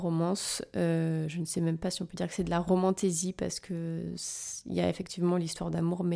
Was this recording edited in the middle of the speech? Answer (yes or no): no